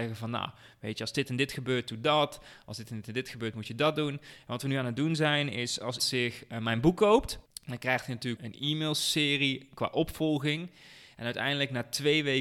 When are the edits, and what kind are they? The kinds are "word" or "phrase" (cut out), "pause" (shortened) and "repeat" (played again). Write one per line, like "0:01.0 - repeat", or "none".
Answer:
0:06.0 - word
0:07.5 - pause
0:08.4 - word